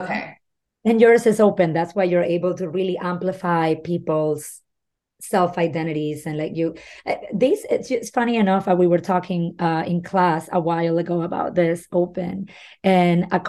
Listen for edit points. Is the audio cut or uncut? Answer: uncut